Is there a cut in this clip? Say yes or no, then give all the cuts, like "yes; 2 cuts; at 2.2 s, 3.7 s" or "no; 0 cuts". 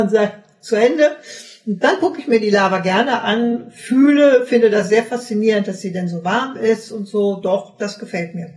no; 0 cuts